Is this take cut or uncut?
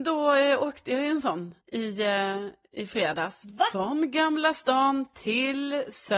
cut